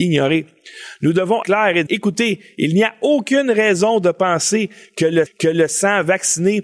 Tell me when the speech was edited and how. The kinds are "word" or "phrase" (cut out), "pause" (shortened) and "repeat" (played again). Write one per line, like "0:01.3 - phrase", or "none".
0:01.4 - phrase
0:01.9 - word
0:05.3 - repeat